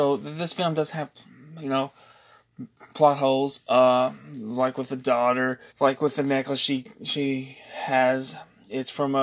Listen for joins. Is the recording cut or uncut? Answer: cut